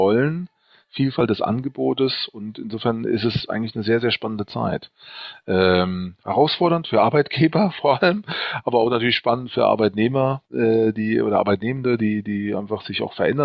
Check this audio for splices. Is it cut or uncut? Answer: cut